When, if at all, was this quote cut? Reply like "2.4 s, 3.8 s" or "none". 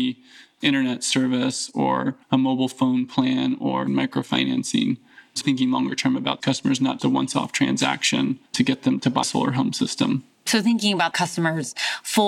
2.2 s, 5.4 s, 6.4 s, 7.0 s, 8.5 s, 9.2 s, 11.1 s